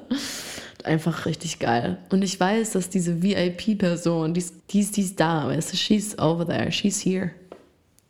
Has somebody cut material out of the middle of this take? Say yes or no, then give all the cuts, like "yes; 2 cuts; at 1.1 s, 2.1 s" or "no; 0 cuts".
yes; 2 cuts; at 1.2 s, 4.6 s